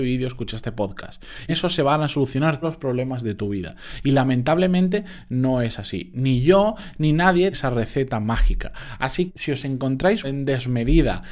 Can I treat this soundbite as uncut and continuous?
no; 5 cuts; at 1.5 s, 2.6 s, 7.5 s, 9.3 s, 10.2 s

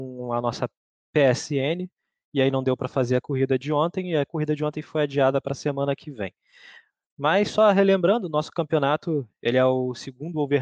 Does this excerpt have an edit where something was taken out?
no; 0 cuts

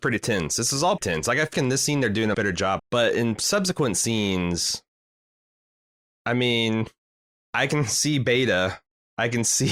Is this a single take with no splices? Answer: no; 5 cuts; at 1.0 s, 1.5 s, 2.3 s, 2.8 s, 7.4 s

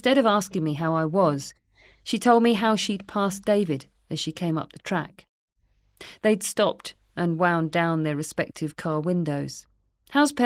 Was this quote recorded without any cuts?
yes; 0 cuts

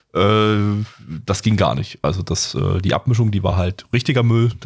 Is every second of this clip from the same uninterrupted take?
yes; 0 cuts

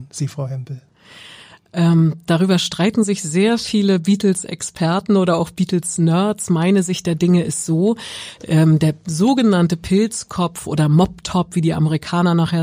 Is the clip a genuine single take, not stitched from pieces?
yes; 0 cuts

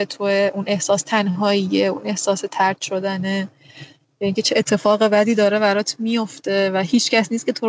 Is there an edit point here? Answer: no; 0 cuts

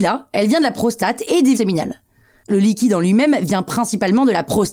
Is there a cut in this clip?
yes; 2 cuts; at 1.5 s, 2.5 s

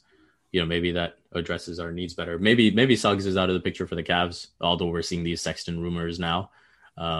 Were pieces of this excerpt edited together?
no; 0 cuts

